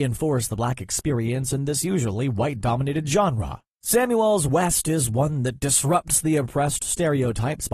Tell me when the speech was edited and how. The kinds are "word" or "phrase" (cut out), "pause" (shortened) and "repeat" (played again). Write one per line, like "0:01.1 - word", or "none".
0:04.5 - word